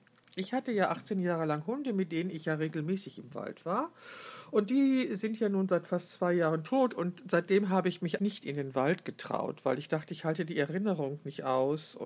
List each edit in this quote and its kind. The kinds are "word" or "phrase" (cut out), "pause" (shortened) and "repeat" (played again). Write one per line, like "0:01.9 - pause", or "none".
0:08.2 - word